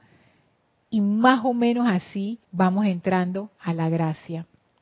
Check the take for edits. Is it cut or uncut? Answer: cut